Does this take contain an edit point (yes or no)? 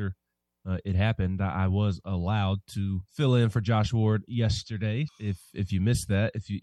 yes